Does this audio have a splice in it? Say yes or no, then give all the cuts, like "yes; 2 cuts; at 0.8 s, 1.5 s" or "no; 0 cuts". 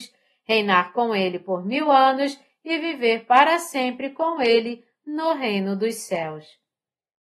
no; 0 cuts